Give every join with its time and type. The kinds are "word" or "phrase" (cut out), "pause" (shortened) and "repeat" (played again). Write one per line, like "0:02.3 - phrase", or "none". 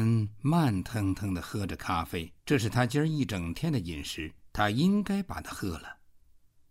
0:02.4 - pause
0:04.5 - pause